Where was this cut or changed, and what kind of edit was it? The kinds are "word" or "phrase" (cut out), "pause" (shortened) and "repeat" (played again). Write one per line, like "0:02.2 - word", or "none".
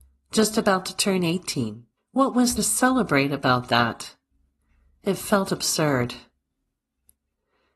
0:02.0 - pause
0:02.6 - word